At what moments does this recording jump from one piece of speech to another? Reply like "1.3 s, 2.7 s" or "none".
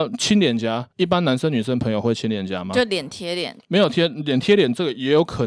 0.9 s, 3.6 s

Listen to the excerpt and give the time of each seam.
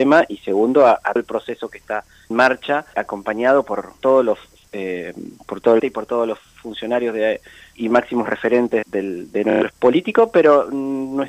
1.2 s, 2.3 s, 2.9 s, 4.0 s, 5.8 s, 7.8 s, 8.8 s, 9.7 s

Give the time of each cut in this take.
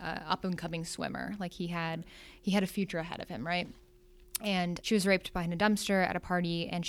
none

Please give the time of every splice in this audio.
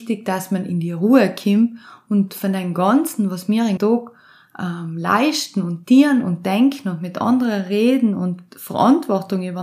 3.8 s

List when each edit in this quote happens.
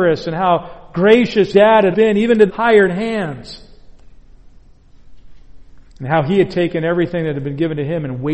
1.5 s, 1.9 s, 2.5 s, 5.9 s

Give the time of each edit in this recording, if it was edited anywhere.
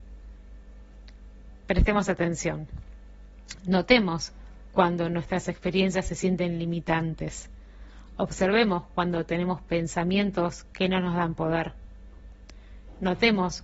none

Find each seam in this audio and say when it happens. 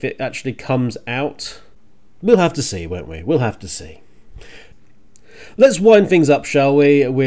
none

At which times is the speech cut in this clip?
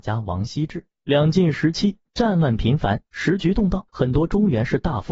3.1 s, 3.9 s

